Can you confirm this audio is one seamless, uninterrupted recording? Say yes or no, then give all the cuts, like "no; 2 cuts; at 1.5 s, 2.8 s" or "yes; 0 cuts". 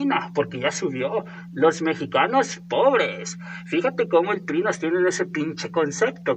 yes; 0 cuts